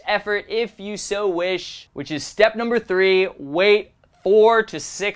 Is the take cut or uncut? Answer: uncut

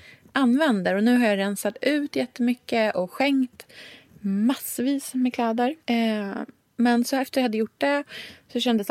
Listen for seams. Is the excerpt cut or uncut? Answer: cut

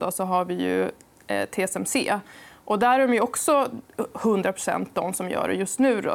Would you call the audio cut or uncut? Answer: uncut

